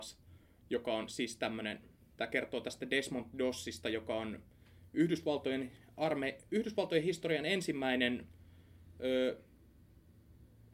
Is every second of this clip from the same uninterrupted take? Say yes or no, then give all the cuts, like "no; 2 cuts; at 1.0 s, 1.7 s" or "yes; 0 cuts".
yes; 0 cuts